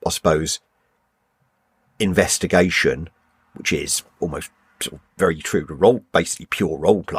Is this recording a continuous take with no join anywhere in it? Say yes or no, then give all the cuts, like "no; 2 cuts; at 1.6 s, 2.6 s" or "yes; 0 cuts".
no; 1 cut; at 5.1 s